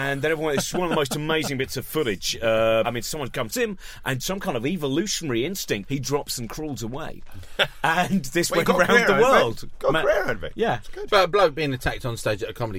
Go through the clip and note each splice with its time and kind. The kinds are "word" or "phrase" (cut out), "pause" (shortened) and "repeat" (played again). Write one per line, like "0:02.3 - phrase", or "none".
0:02.8 - phrase
0:03.5 - word
0:04.2 - phrase
0:05.8 - word